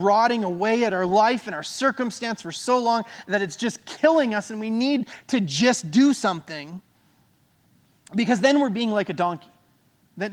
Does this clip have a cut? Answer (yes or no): no